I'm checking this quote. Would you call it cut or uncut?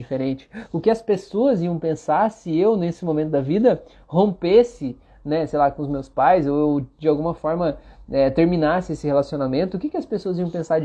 uncut